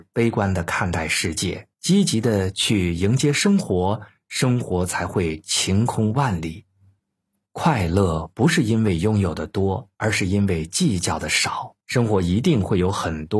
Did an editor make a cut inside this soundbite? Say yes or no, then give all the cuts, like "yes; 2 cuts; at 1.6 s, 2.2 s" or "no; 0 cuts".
yes; 4 cuts; at 1.7 s, 7.0 s, 9.9 s, 11.8 s